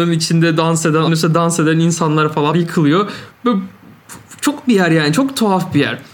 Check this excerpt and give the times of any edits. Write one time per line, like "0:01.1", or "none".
0:01.1
0:02.5
0:04.6